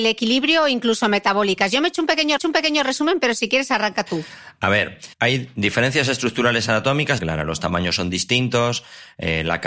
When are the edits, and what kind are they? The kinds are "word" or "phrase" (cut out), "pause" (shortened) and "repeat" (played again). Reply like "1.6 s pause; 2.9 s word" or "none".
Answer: 2.4 s repeat; 5.1 s pause; 7.2 s word